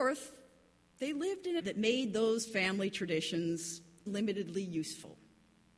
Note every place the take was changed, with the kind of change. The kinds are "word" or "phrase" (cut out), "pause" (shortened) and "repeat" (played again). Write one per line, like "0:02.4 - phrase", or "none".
0:01.6 - word
0:04.1 - word